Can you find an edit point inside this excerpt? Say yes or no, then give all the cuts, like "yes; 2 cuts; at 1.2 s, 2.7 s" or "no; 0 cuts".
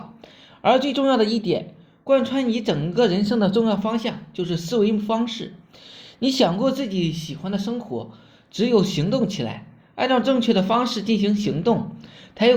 no; 0 cuts